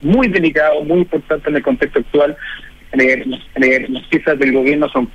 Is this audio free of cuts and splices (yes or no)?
no